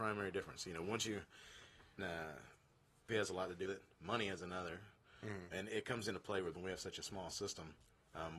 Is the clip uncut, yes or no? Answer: no